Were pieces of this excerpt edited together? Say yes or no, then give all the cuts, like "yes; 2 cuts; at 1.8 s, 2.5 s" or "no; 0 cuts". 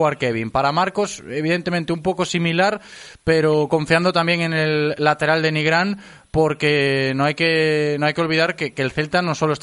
no; 0 cuts